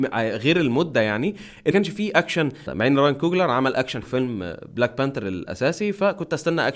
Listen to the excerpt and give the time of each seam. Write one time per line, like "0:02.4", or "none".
0:01.7
0:02.7
0:04.0